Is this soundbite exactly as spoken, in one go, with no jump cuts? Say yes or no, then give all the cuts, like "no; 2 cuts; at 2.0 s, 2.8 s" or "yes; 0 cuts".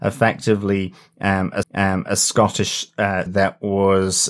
no; 2 cuts; at 1.6 s, 3.3 s